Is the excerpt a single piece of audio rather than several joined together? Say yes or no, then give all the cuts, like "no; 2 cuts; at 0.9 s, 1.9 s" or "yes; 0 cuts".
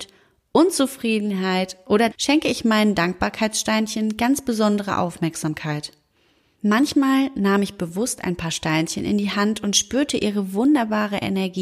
no; 1 cut; at 2.1 s